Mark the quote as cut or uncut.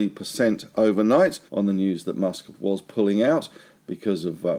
cut